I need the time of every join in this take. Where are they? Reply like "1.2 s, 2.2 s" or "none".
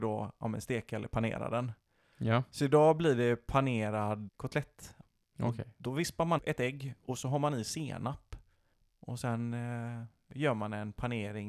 4.3 s, 6.4 s